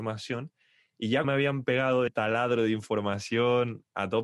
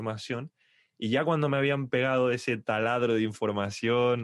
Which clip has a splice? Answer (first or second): first